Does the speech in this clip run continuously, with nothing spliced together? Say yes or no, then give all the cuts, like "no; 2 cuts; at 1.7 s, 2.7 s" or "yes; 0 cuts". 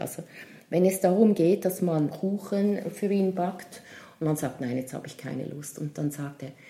no; 1 cut; at 2.1 s